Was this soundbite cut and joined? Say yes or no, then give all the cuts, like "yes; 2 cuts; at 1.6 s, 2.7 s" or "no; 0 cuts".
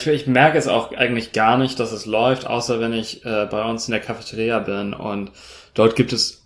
no; 0 cuts